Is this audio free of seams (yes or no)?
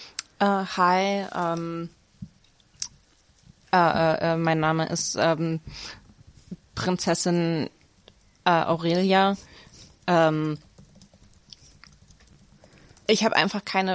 yes